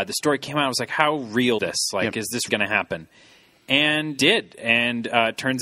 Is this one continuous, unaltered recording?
no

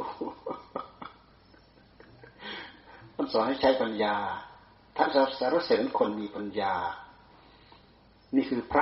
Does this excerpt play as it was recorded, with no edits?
yes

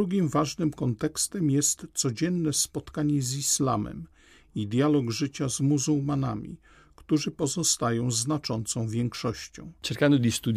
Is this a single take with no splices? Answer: yes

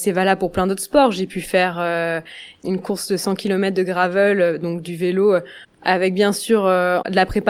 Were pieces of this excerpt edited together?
no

